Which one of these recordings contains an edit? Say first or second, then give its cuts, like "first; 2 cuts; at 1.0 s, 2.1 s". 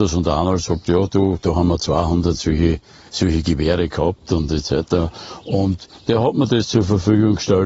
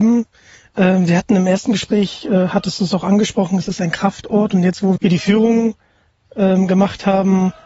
second; 1 cut; at 5.0 s